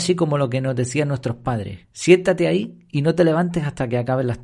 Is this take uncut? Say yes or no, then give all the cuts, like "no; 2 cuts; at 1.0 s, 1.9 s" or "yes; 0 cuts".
no; 1 cut; at 1.8 s